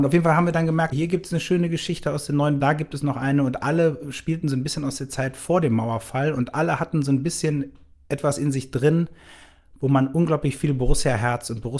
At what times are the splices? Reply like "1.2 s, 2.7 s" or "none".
0.9 s, 2.6 s